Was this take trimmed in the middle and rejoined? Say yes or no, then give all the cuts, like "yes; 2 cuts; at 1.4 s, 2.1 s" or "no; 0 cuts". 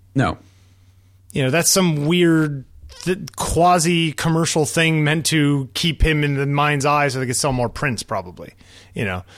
no; 0 cuts